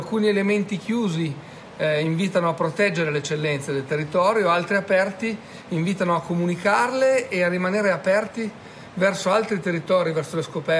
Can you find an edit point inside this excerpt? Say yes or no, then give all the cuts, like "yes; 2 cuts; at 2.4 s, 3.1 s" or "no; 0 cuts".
no; 0 cuts